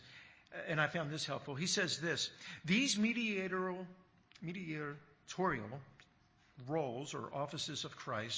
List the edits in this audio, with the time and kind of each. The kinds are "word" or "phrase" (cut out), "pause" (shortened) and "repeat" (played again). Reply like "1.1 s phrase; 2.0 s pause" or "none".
none